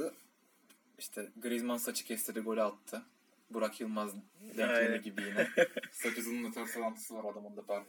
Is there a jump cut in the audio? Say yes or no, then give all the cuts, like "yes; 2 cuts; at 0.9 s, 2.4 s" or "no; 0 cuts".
no; 0 cuts